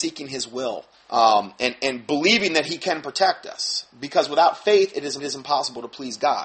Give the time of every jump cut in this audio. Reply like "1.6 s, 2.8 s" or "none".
0.9 s, 5.2 s